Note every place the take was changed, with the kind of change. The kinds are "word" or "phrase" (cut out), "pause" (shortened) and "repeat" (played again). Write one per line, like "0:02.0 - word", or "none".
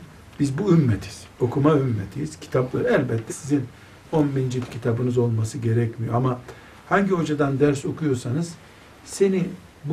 0:03.3 - word